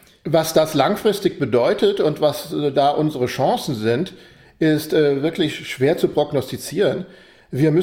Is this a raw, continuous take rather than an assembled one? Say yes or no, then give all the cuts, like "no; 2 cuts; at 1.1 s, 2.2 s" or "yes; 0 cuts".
yes; 0 cuts